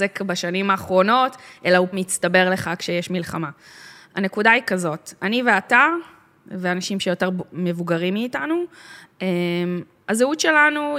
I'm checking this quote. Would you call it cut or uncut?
cut